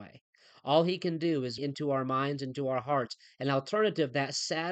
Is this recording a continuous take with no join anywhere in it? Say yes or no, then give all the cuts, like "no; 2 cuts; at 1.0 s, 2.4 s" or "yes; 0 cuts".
no; 1 cut; at 1.6 s